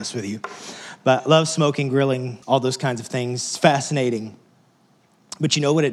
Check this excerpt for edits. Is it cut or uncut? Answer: cut